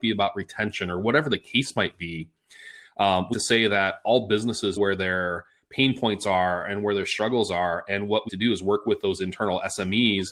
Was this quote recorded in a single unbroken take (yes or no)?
no